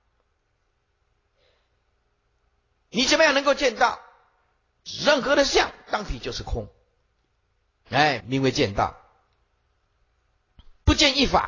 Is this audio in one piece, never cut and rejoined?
no; 1 cut; at 8.2 s

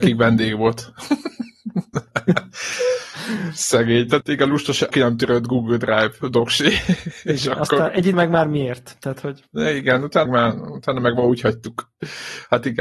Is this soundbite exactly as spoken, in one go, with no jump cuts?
no; 4 cuts; at 4.2 s, 4.9 s, 8.1 s, 10.3 s

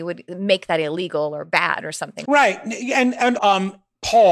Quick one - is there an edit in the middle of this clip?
yes; 2 cuts; at 2.2 s, 3.4 s

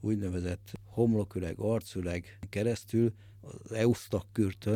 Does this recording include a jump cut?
no; 0 cuts

